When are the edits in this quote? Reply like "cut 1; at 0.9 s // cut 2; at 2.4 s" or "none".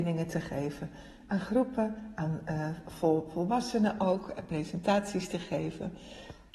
none